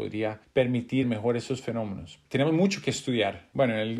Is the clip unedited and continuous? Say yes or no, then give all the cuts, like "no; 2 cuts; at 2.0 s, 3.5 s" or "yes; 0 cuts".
no; 1 cut; at 1.0 s